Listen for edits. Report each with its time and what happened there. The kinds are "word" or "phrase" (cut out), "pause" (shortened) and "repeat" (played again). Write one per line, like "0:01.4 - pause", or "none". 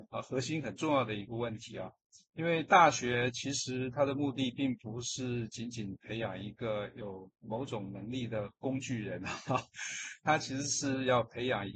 0:07.4 - pause